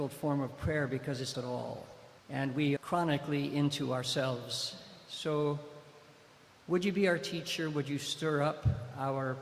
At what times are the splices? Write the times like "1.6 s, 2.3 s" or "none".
1.3 s, 2.2 s, 2.8 s